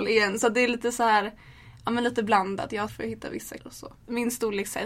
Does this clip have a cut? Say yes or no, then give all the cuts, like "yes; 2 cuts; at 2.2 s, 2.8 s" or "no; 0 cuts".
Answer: yes; 2 cuts; at 2.9 s, 3.6 s